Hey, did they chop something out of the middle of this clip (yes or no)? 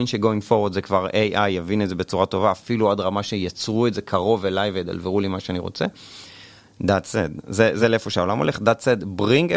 no